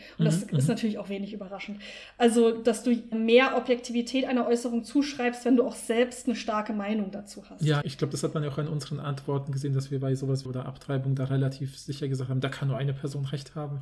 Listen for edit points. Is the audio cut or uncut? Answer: cut